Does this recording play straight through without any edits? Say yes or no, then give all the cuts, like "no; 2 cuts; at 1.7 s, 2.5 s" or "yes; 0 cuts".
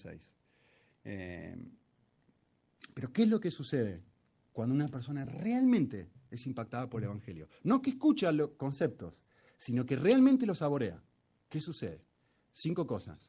yes; 0 cuts